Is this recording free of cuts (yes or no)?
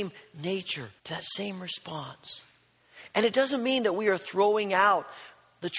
no